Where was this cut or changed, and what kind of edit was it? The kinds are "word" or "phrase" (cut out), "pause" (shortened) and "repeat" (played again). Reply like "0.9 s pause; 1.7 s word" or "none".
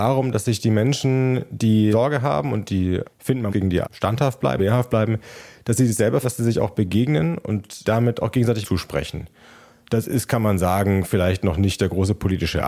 1.9 s word; 3.0 s word; 3.5 s word; 3.8 s word; 4.6 s word; 6.2 s word; 7.8 s word; 8.6 s word